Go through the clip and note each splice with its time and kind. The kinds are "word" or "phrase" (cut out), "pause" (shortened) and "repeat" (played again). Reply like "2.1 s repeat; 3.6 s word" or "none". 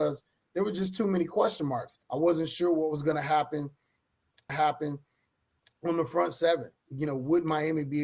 2.0 s pause; 4.5 s repeat